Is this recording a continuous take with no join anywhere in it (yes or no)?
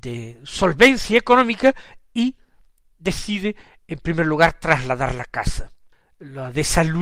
yes